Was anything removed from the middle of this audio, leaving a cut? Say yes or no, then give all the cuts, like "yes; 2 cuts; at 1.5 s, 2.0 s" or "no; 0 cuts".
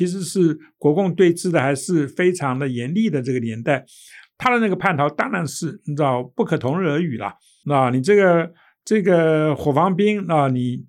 no; 0 cuts